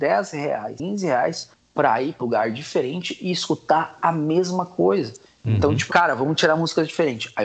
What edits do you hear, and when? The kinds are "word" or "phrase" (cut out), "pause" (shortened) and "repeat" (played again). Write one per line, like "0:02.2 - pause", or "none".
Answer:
0:02.2 - word
0:05.9 - word